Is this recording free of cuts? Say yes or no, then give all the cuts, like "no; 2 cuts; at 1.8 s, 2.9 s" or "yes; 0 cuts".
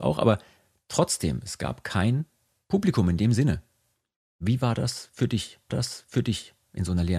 no; 1 cut; at 5.7 s